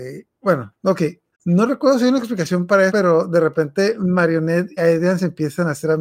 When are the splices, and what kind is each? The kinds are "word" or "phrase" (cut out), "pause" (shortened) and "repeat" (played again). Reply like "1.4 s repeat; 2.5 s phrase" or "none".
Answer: 1.3 s pause; 2.9 s word; 4.8 s word